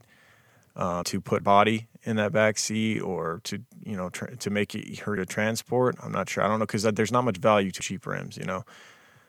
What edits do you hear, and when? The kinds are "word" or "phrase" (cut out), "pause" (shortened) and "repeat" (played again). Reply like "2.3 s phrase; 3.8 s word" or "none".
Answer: 1.0 s word; 1.4 s word; 5.2 s word; 7.8 s phrase